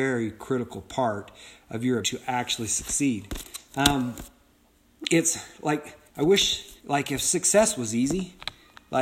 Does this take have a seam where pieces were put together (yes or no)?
yes